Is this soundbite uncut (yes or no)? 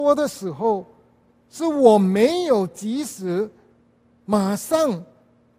yes